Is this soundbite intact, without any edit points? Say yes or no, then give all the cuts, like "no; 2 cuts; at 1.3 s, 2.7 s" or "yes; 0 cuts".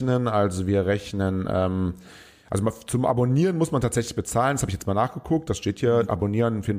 yes; 0 cuts